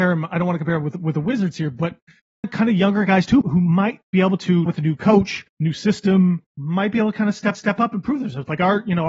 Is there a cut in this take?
yes; 6 cuts; at 2.4 s, 3.4 s, 4.7 s, 5.5 s, 6.5 s, 7.5 s

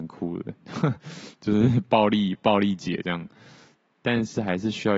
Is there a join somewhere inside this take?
no; 0 cuts

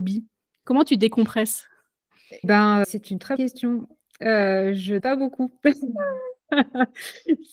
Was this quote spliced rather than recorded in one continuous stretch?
yes; 5 cuts; at 2.4 s, 2.8 s, 3.4 s, 5.0 s, 6.4 s

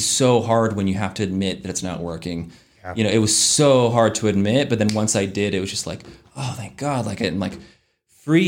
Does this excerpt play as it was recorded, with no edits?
yes; 0 cuts

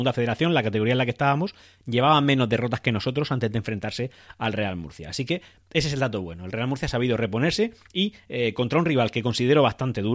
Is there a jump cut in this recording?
no; 0 cuts

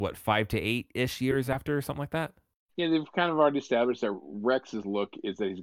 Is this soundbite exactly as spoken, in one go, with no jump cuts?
yes; 0 cuts

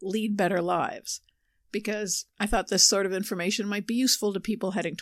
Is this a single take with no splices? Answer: yes; 0 cuts

